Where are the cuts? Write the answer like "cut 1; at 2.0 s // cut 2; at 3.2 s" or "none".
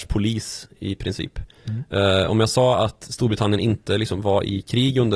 none